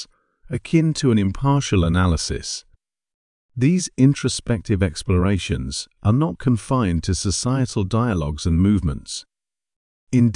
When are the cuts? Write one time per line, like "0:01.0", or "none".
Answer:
none